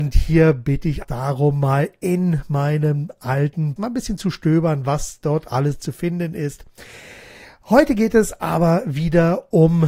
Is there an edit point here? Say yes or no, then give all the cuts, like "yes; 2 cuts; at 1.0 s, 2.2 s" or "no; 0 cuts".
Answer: yes; 2 cuts; at 1.0 s, 3.8 s